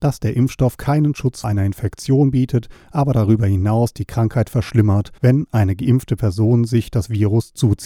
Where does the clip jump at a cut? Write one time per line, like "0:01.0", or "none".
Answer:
0:01.4
0:05.2